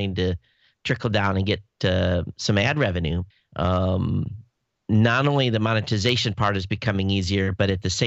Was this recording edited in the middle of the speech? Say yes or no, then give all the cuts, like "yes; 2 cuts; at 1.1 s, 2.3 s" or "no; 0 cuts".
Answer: yes; 1 cut; at 3.3 s